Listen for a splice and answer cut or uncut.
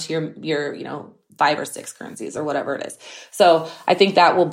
uncut